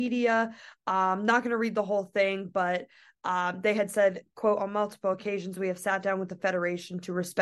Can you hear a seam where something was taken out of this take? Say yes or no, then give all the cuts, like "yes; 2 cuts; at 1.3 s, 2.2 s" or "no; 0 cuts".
no; 0 cuts